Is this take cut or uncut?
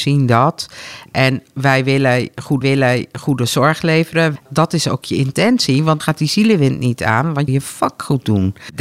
cut